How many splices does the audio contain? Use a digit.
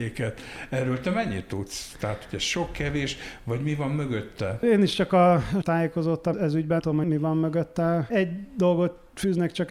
3